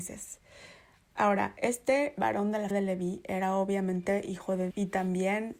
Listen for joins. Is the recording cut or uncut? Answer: cut